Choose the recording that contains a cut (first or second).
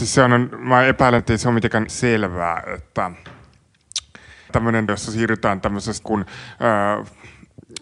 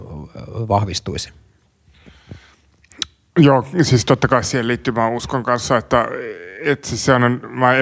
first